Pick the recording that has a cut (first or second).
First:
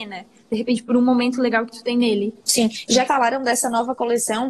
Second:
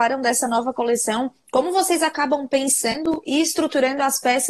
first